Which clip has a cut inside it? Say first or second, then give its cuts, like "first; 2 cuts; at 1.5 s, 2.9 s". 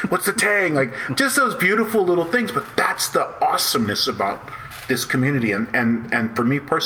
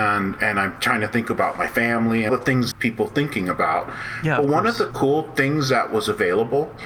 second; 3 cuts; at 2.3 s, 2.7 s, 4.9 s